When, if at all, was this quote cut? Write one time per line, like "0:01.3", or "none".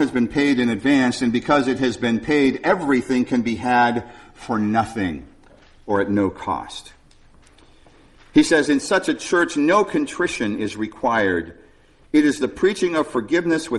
none